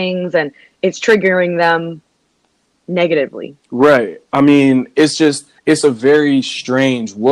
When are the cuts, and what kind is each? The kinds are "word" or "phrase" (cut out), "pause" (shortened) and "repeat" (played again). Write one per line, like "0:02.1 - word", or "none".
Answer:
0:03.6 - pause
0:05.6 - pause